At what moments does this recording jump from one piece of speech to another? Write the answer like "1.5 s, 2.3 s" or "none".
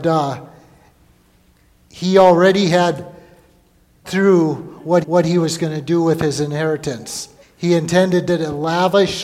4.0 s, 5.0 s, 7.4 s, 8.3 s